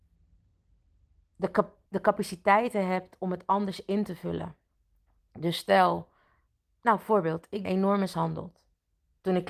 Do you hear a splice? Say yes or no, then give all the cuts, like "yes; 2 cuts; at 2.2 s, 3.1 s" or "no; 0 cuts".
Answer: yes; 2 cuts; at 1.9 s, 7.6 s